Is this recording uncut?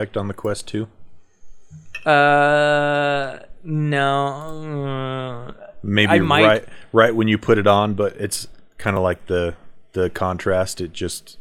yes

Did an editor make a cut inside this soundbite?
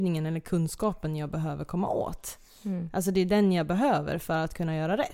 no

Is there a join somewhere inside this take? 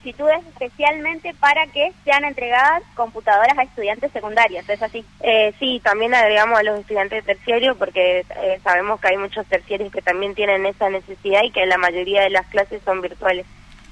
no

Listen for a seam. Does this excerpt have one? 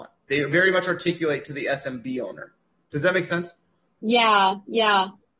no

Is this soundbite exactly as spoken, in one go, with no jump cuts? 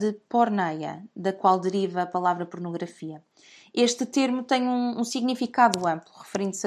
yes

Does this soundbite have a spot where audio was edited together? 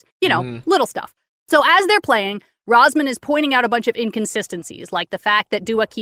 no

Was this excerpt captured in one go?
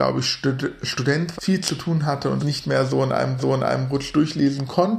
no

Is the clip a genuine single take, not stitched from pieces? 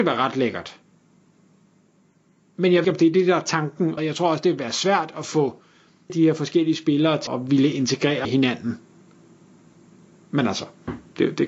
no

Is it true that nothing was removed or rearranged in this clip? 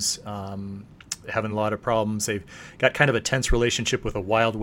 yes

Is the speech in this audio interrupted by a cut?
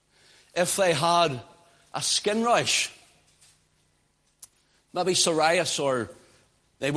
no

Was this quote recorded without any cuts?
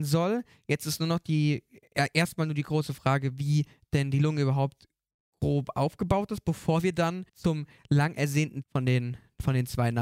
no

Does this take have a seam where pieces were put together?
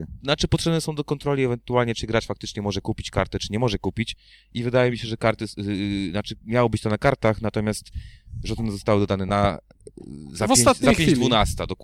no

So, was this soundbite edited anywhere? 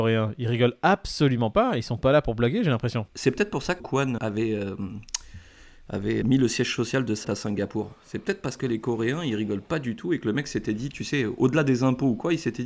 yes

